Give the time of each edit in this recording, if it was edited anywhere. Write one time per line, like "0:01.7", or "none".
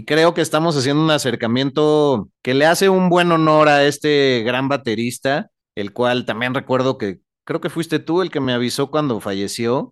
none